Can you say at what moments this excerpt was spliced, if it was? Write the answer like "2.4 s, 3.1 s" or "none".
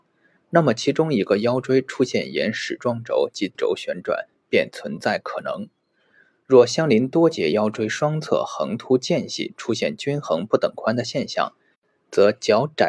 3.5 s